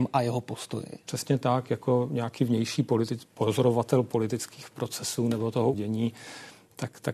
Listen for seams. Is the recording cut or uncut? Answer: cut